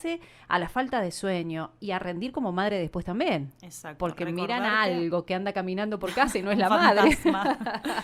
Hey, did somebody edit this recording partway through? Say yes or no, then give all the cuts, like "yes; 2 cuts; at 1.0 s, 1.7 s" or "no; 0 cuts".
no; 0 cuts